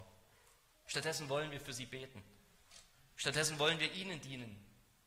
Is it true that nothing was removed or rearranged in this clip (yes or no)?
yes